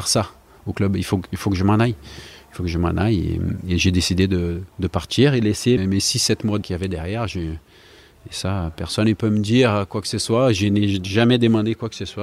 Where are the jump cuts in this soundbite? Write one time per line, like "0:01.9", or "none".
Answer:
0:04.7
0:05.8
0:06.6